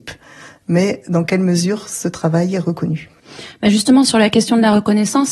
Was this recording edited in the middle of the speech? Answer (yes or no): no